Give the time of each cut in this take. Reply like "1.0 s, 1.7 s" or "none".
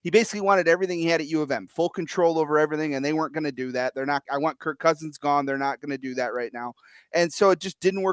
4.3 s